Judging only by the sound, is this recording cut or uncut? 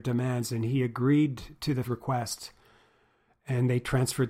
cut